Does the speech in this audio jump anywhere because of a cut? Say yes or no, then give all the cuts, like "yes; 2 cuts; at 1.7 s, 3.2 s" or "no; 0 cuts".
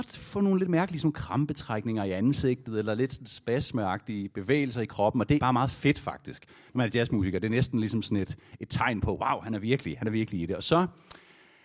yes; 1 cut; at 5.4 s